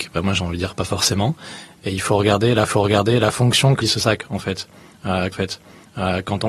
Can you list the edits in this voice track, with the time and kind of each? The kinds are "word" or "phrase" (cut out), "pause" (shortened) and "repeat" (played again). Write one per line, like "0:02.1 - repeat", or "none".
0:02.7 - repeat
0:03.8 - word
0:05.3 - repeat